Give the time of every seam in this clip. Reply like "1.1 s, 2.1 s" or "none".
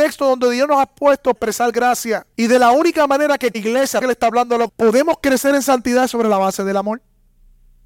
1.3 s, 2.3 s, 3.5 s, 4.0 s, 4.7 s